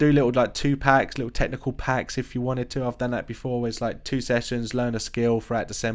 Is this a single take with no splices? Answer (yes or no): yes